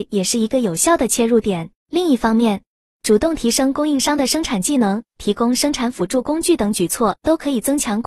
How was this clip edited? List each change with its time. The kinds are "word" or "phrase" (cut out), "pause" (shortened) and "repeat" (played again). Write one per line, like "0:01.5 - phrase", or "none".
0:01.8 - pause